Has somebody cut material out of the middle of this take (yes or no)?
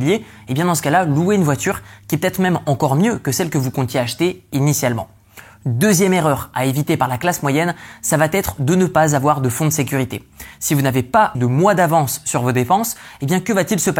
yes